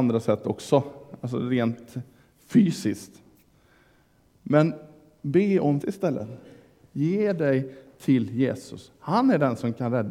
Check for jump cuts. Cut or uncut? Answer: cut